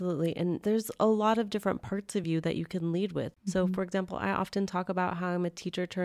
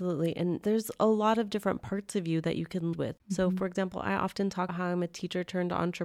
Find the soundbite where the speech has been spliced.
second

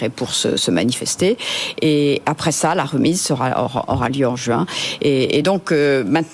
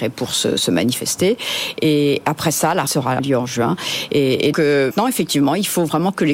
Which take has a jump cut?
second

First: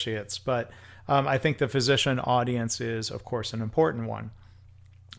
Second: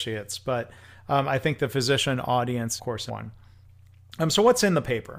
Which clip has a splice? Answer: second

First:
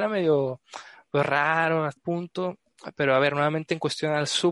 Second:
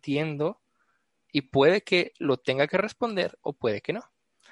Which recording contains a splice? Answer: first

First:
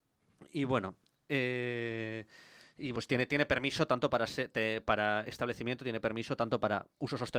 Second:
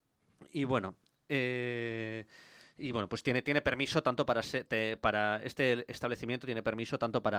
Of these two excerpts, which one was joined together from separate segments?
first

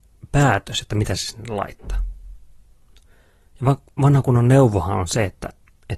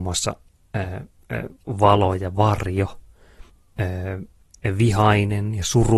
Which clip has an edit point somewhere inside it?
second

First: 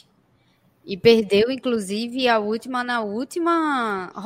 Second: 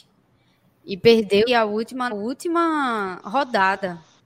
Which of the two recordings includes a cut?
second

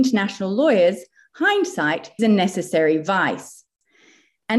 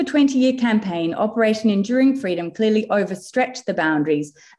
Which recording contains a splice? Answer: first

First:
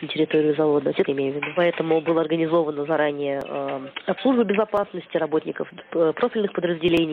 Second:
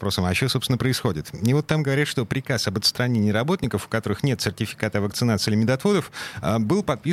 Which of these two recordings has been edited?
first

